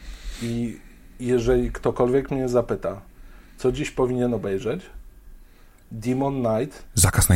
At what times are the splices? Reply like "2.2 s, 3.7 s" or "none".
none